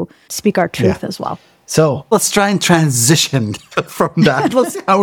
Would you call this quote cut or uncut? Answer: uncut